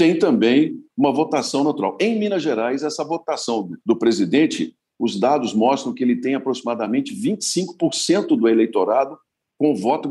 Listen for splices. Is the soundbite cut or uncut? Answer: cut